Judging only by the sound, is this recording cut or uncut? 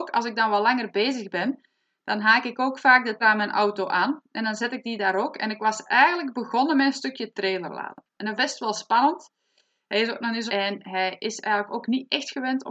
cut